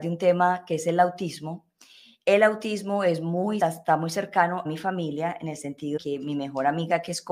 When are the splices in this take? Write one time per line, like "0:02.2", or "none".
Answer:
0:03.6
0:04.7
0:06.0